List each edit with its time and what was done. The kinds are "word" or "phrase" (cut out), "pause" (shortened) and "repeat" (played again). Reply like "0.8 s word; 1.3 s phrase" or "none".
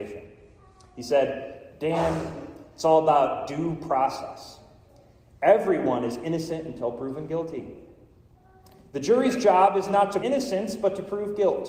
10.2 s word

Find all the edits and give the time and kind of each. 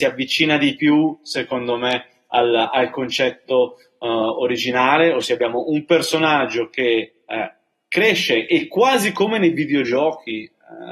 none

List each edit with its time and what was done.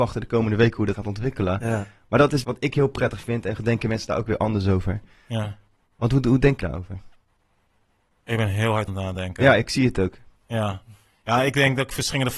0.9 s word; 2.4 s word; 3.6 s word; 6.6 s word; 8.9 s word

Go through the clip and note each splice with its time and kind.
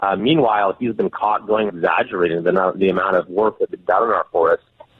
1.7 s word; 3.7 s word

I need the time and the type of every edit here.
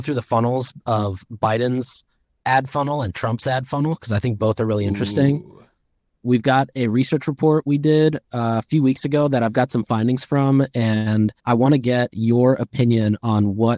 11.4 s pause

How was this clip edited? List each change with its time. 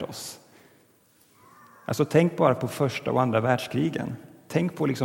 none

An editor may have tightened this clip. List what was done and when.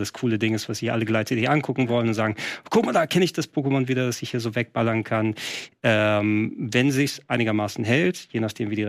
none

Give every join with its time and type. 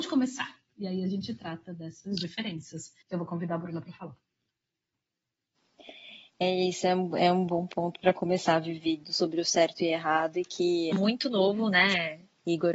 3.0 s pause; 10.9 s phrase

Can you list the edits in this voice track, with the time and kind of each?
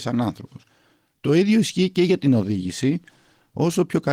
none

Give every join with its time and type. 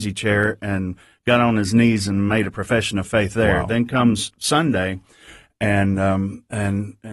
none

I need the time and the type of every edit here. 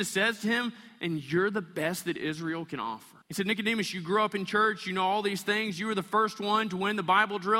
3.2 s pause

